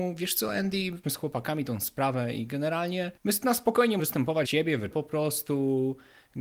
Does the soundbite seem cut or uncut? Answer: cut